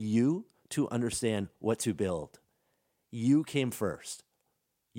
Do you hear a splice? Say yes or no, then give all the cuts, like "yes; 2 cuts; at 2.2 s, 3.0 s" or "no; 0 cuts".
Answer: no; 0 cuts